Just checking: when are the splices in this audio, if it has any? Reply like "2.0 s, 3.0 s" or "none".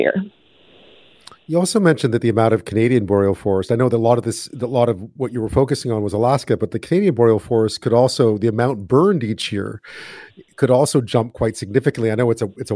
none